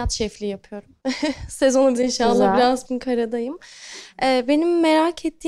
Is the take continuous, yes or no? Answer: no